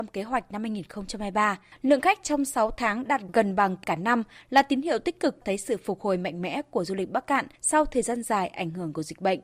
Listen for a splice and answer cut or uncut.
cut